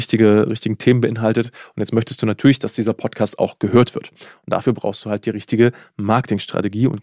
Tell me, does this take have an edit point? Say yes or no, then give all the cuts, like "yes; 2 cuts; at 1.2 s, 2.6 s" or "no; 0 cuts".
no; 0 cuts